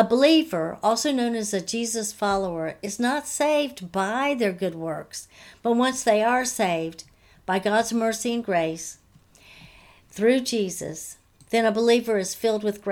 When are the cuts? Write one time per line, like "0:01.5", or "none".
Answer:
none